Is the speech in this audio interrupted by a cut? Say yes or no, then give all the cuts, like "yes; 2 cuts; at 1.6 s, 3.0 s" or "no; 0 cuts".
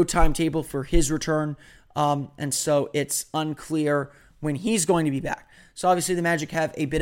no; 0 cuts